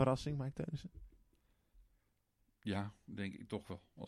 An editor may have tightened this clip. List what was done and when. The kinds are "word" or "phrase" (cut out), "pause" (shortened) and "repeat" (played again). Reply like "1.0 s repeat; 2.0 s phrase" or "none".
none

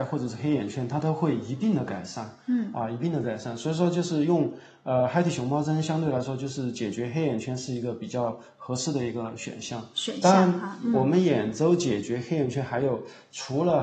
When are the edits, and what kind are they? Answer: none

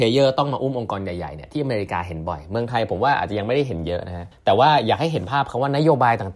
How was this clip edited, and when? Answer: 4.3 s pause

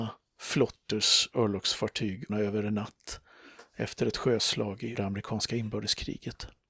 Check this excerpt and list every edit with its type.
2.3 s word; 4.9 s word

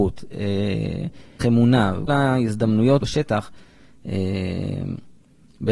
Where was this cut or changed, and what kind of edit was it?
1.4 s phrase; 2.1 s word; 3.0 s word

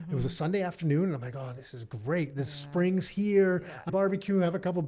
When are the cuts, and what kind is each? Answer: 3.9 s word

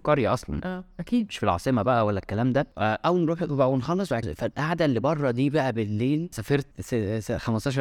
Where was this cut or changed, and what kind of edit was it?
4.2 s phrase; 6.3 s word; 6.7 s word

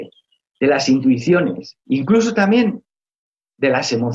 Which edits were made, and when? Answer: 1.8 s pause

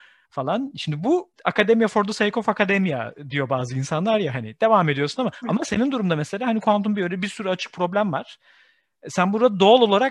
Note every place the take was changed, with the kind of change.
1.3 s pause

